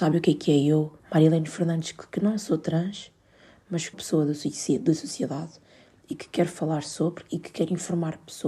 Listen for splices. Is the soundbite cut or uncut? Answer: cut